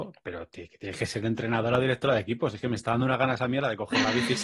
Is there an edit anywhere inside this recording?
no; 0 cuts

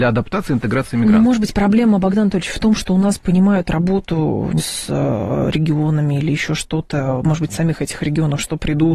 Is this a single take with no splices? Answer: no; 1 cut; at 4.6 s

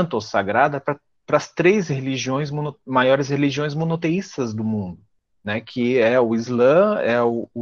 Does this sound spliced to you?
no; 0 cuts

